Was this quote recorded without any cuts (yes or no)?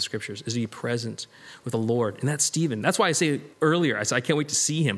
no